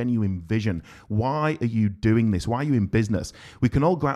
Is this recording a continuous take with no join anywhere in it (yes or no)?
yes